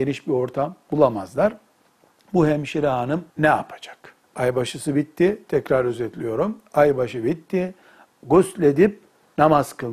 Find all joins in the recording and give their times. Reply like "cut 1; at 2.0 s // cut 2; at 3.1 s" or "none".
cut 1; at 3.3 s // cut 2; at 4.2 s